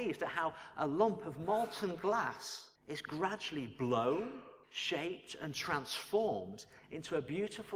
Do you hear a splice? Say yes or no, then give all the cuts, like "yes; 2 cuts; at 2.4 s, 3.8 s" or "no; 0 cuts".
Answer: yes; 2 cuts; at 2.8 s, 4.6 s